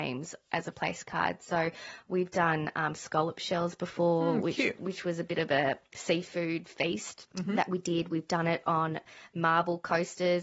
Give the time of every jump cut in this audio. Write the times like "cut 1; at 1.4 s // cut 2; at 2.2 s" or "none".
cut 1; at 7.3 s